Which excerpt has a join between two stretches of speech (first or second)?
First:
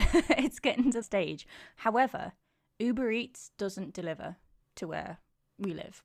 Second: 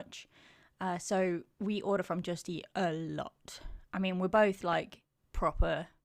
first